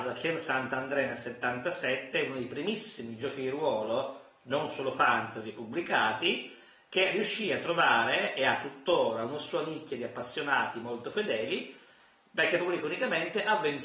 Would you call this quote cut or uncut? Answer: uncut